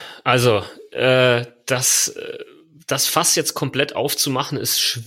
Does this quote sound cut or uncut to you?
uncut